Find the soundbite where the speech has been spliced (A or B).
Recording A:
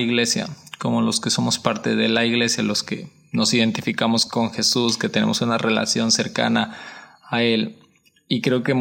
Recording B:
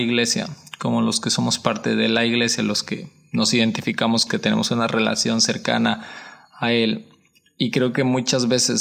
B